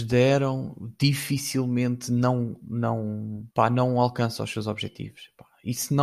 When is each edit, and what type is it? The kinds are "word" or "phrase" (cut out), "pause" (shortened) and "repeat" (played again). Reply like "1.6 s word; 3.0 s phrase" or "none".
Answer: 3.5 s pause